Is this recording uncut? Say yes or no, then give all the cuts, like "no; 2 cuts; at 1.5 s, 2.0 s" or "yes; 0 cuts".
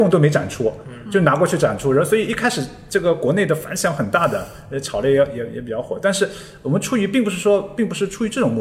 yes; 0 cuts